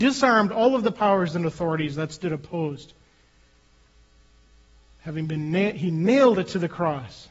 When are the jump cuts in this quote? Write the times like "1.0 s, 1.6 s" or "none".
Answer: none